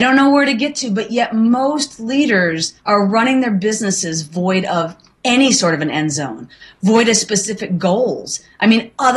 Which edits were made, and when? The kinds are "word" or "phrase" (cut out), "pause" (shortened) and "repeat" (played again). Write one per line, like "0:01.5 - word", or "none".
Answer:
0:02.8 - pause